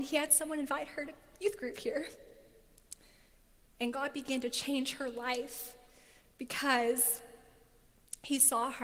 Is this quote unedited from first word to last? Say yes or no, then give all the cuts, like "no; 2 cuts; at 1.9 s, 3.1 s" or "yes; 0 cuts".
yes; 0 cuts